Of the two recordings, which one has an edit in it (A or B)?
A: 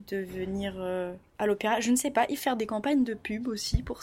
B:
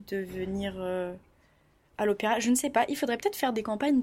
A